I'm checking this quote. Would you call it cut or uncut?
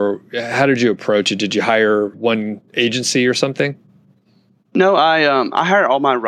cut